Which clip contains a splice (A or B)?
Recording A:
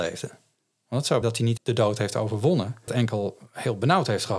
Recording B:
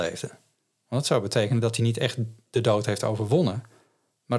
A